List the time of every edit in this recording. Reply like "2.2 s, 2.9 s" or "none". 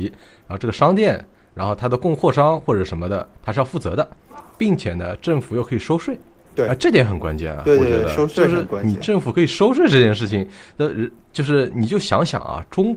6.5 s